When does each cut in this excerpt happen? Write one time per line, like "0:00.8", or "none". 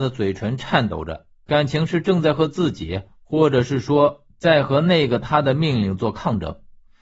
none